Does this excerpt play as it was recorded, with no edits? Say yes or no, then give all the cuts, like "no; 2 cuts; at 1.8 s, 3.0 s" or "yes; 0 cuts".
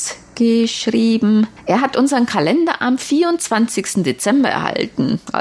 yes; 0 cuts